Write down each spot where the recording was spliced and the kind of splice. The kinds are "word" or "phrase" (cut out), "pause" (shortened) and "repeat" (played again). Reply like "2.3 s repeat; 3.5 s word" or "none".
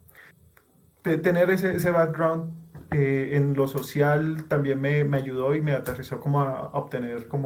none